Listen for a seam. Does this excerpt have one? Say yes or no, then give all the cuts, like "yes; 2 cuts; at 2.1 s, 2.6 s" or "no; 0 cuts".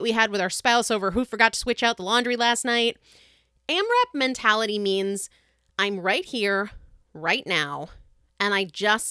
no; 0 cuts